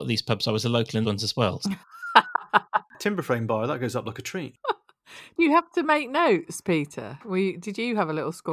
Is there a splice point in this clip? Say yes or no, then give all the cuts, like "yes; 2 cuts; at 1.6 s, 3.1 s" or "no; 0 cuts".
yes; 2 cuts; at 1.0 s, 5.4 s